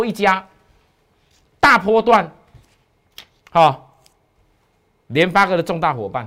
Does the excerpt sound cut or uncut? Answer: uncut